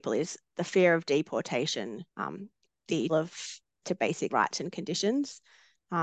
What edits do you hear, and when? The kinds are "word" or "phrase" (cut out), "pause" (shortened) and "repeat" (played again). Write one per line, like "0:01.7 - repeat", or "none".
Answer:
0:02.1 - pause
0:03.1 - word
0:03.8 - word
0:04.3 - word